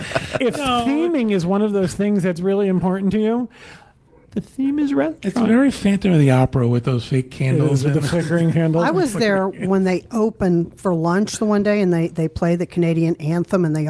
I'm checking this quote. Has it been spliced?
no; 0 cuts

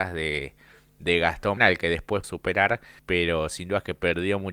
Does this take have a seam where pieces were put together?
yes; 3 cuts; at 1.6 s, 2.2 s, 3.0 s

